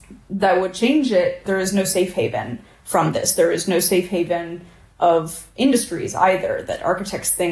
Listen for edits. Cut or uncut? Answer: uncut